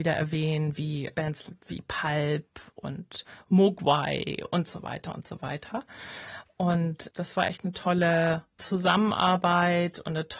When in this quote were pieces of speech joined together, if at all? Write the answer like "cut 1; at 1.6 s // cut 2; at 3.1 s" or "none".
none